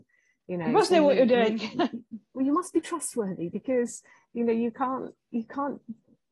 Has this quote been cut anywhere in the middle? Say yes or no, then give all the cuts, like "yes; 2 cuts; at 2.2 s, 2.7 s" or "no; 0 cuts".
no; 0 cuts